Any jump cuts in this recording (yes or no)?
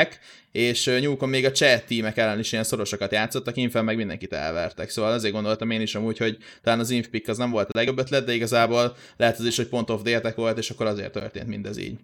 no